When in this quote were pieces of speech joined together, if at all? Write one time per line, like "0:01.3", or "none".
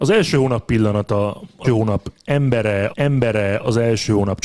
0:01.6
0:02.9